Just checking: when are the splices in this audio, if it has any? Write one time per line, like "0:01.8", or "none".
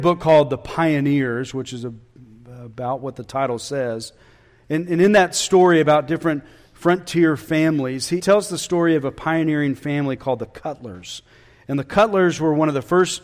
0:08.2